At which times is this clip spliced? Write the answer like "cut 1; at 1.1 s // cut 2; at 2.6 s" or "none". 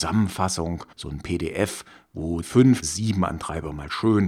cut 1; at 0.9 s // cut 2; at 2.4 s // cut 3; at 2.8 s